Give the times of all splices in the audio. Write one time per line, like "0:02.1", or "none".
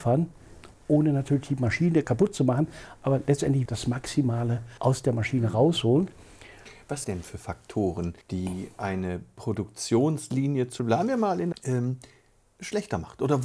0:02.0
0:03.7
0:04.8
0:07.0
0:08.2
0:10.8
0:11.5